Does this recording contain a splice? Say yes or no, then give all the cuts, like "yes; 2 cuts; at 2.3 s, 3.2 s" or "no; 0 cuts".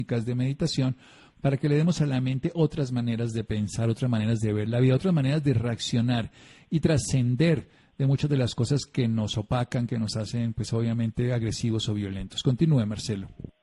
no; 0 cuts